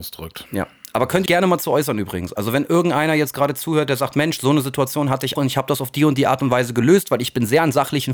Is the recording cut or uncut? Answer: cut